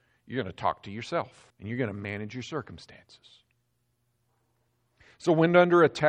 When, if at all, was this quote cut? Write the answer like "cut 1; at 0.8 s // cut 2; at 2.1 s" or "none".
cut 1; at 1.5 s